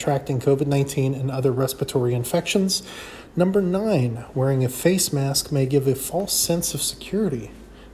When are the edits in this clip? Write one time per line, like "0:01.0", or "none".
none